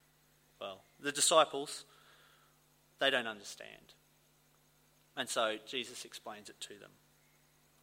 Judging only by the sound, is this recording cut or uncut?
uncut